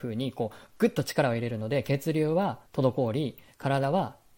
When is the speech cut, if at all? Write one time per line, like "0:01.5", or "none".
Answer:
0:02.7